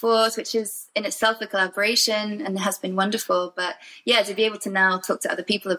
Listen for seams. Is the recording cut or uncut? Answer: uncut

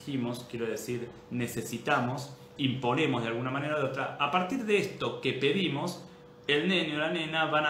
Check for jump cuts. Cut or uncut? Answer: cut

